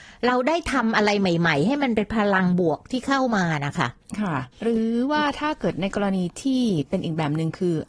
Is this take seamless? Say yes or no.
no